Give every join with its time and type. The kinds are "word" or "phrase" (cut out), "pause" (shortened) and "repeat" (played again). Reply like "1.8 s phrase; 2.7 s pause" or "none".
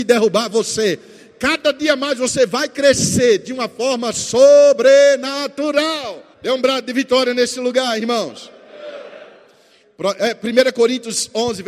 6.3 s pause

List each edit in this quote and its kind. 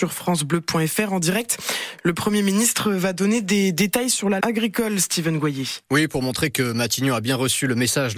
4.4 s phrase; 5.8 s pause

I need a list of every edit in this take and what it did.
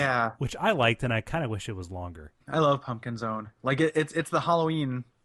2.4 s pause

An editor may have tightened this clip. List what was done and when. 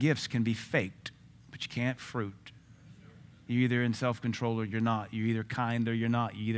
2.0 s word

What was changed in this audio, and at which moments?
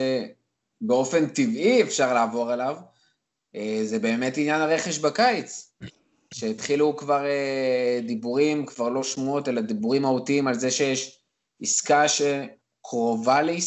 none

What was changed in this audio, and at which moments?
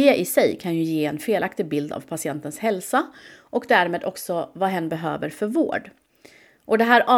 none

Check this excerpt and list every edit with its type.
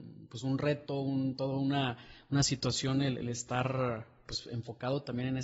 none

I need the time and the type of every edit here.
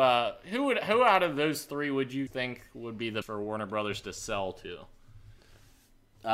2.3 s word; 3.2 s phrase

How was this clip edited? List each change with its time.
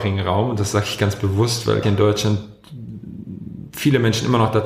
1.8 s word

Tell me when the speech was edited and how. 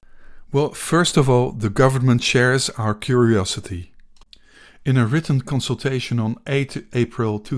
none

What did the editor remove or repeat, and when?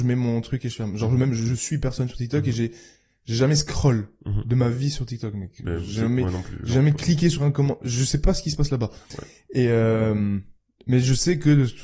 none

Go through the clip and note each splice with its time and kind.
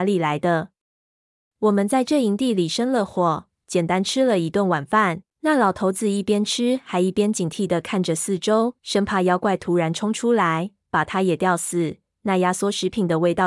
5.3 s pause; 8.8 s pause

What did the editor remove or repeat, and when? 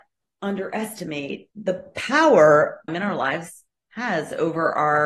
1.5 s pause; 2.9 s phrase

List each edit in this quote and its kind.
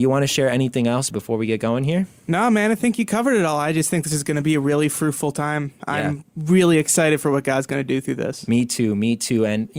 none

